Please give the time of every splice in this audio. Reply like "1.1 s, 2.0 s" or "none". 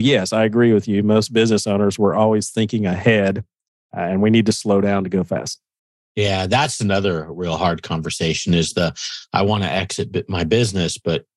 none